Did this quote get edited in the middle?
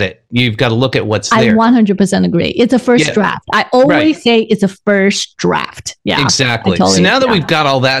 no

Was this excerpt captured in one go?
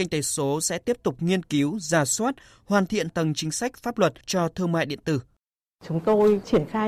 no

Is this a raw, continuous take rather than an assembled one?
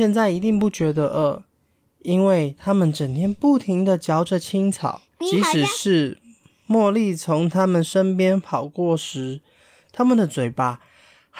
no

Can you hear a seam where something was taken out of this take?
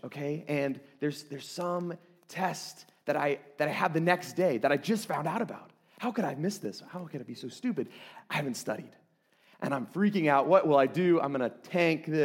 no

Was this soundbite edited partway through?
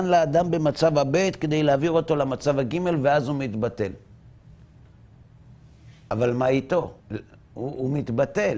yes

